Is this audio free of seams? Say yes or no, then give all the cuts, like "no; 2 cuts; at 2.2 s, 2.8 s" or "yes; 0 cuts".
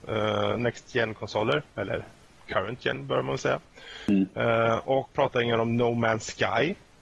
no; 1 cut; at 5.1 s